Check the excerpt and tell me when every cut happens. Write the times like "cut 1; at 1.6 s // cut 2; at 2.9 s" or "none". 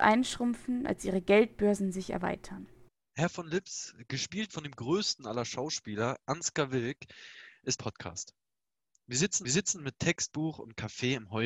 cut 1; at 2.9 s // cut 2; at 7.8 s // cut 3; at 9.4 s